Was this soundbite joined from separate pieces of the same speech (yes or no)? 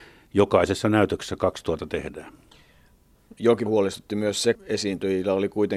yes